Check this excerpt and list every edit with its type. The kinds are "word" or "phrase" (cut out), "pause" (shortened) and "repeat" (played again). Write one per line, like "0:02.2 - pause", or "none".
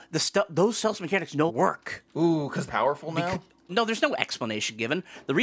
0:01.5 - word
0:02.1 - pause
0:02.7 - phrase
0:03.7 - word